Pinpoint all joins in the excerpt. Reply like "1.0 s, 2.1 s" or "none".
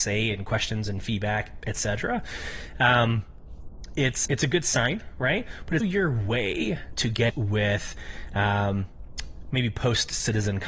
4.2 s, 5.8 s, 6.9 s, 7.3 s